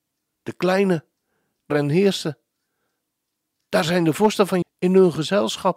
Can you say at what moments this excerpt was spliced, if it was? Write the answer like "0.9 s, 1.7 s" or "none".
1.7 s, 4.6 s